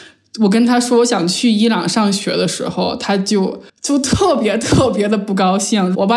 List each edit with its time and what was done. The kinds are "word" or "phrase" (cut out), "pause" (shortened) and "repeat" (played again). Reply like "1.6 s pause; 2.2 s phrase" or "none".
3.7 s pause